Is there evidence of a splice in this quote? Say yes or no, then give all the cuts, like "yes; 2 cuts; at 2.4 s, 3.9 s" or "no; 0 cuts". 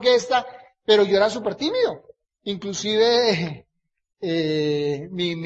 no; 0 cuts